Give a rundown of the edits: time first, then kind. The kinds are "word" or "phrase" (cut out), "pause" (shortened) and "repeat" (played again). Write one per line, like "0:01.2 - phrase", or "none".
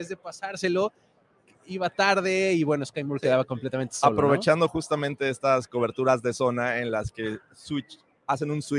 none